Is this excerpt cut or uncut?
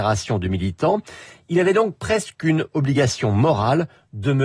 uncut